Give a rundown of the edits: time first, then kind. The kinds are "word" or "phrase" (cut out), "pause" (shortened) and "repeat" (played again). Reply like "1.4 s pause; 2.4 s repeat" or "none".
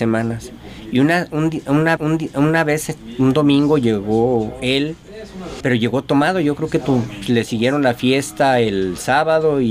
2.0 s repeat; 5.6 s phrase